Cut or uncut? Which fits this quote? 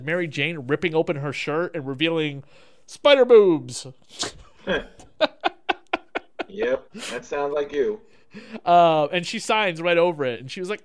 uncut